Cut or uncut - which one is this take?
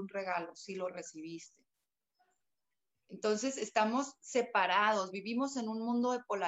uncut